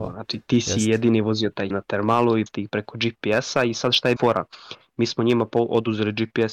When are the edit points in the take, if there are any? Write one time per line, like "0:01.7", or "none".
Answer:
0:01.7
0:02.5
0:04.2